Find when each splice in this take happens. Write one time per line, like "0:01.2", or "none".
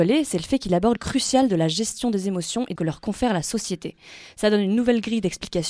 0:01.0
0:02.8